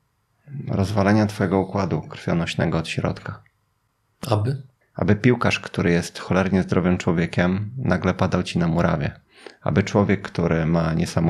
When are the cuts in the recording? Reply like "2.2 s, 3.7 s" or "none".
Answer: 4.8 s